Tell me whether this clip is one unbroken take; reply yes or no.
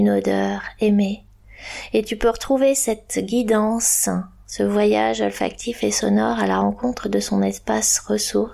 yes